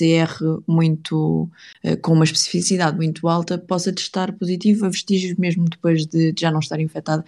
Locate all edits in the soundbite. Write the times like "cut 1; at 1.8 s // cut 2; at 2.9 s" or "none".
none